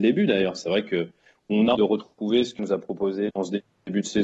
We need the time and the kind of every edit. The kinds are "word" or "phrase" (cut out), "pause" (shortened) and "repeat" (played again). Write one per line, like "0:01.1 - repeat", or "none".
0:01.7 - word
0:02.6 - word
0:03.3 - word